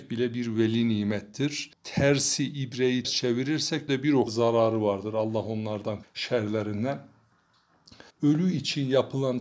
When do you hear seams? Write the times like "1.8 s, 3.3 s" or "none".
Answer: 1.7 s, 3.0 s, 3.9 s, 4.3 s, 6.0 s, 8.1 s